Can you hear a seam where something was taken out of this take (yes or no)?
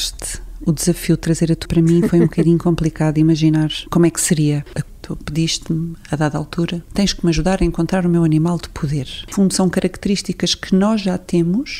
yes